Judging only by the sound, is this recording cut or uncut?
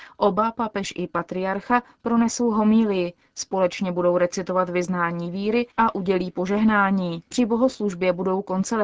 cut